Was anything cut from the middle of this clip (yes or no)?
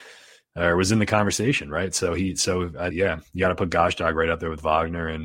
yes